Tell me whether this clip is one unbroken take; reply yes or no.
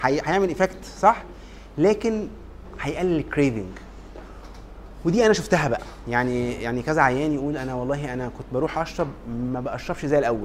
yes